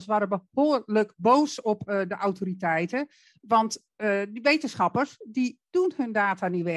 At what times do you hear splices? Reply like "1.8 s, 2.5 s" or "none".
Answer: none